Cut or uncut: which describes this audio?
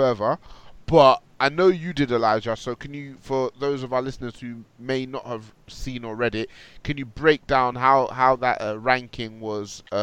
uncut